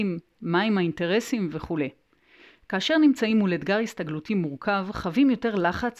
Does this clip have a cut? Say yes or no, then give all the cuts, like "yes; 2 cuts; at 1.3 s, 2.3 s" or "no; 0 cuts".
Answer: no; 0 cuts